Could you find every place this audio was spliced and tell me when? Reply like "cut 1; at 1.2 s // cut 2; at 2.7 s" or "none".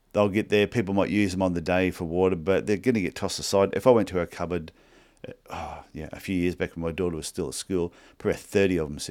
none